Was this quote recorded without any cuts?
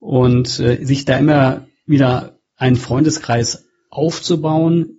yes; 0 cuts

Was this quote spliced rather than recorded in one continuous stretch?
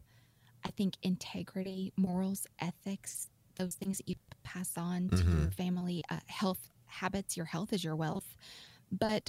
no; 0 cuts

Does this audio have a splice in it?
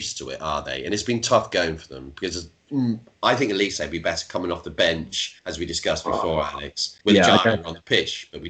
yes; 2 cuts; at 5.4 s, 7.0 s

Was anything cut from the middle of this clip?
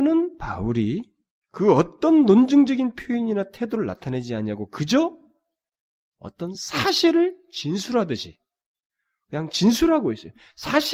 no; 0 cuts

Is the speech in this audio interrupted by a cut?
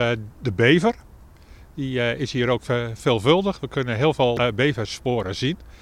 no; 0 cuts

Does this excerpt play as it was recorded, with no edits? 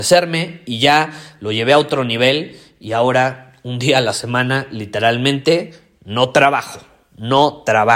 yes; 0 cuts

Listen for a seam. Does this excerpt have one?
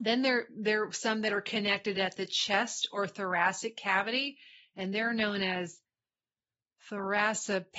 no; 0 cuts

